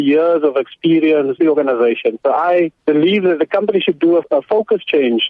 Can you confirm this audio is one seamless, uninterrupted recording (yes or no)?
no